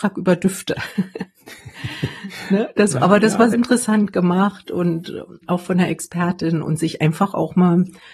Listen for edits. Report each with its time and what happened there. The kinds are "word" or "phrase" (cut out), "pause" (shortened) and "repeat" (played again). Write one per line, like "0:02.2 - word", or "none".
0:03.5 - word